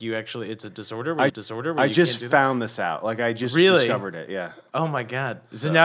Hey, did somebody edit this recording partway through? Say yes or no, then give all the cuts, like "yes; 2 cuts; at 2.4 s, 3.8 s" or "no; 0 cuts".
yes; 1 cut; at 1.3 s